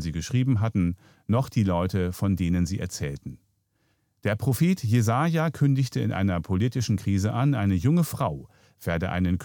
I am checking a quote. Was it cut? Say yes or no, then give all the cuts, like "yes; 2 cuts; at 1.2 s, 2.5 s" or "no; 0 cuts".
no; 0 cuts